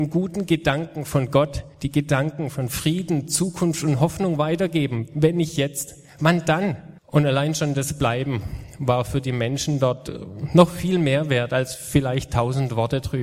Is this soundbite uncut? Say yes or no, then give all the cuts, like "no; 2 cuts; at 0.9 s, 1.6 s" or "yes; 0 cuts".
no; 2 cuts; at 1.7 s, 7.0 s